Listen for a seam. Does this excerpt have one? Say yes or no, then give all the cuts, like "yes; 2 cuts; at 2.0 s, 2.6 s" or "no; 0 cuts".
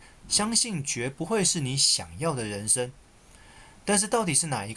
no; 0 cuts